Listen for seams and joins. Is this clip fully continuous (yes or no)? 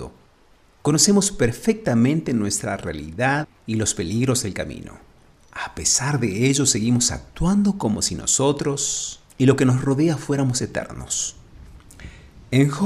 yes